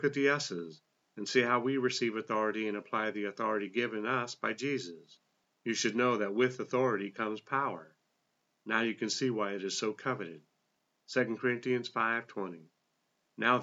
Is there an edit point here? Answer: no; 0 cuts

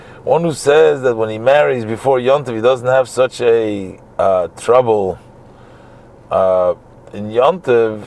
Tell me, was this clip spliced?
no; 0 cuts

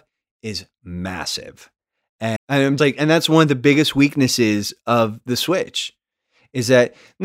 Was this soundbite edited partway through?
yes; 2 cuts; at 2.4 s, 2.8 s

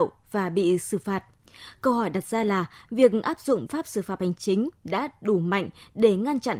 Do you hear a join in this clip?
yes; 1 cut; at 3.7 s

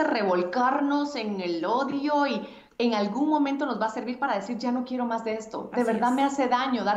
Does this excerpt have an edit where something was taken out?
yes; 1 cut; at 2.7 s

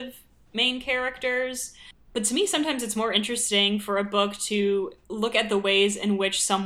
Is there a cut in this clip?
yes; 1 cut; at 5.0 s

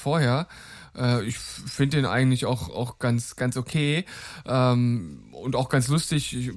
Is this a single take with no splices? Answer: yes; 0 cuts

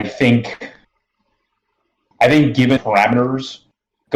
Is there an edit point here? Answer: yes; 1 cut; at 2.8 s

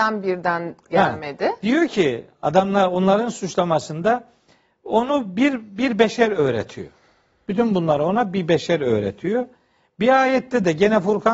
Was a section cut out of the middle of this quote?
no; 0 cuts

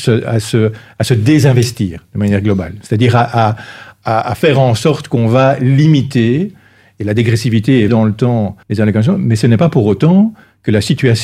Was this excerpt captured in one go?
no; 2 cuts; at 7.9 s, 8.6 s

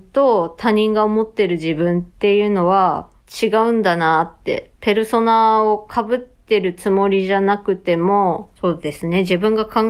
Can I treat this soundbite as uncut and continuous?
no; 3 cuts; at 2.1 s, 3.2 s, 8.6 s

